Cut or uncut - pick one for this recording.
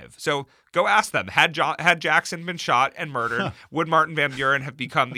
uncut